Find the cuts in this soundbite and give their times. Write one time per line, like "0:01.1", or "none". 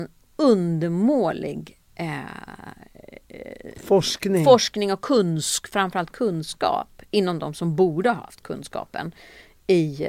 none